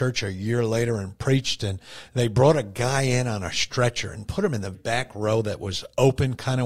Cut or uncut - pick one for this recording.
cut